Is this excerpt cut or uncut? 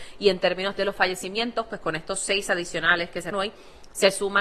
cut